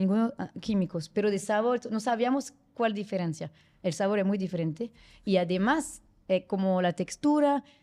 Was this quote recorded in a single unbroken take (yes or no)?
yes